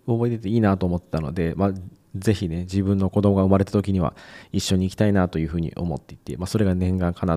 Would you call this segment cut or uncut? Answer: uncut